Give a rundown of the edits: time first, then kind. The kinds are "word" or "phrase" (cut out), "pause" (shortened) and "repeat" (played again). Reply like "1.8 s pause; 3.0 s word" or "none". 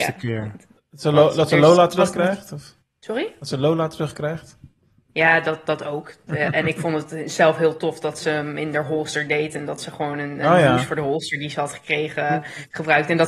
2.8 s pause